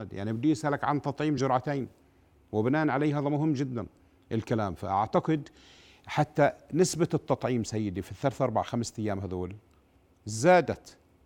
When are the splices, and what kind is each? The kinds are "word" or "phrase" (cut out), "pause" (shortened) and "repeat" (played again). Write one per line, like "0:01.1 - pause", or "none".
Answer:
none